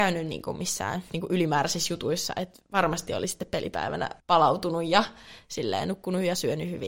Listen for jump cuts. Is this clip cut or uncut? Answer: cut